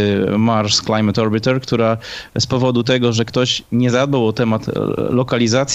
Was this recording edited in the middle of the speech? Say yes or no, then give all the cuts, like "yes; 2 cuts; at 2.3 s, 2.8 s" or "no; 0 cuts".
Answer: no; 0 cuts